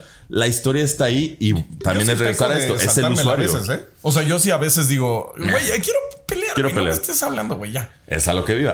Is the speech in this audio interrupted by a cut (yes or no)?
no